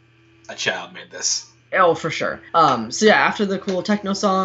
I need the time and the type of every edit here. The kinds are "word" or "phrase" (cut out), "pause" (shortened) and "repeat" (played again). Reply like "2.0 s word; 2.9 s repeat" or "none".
2.5 s pause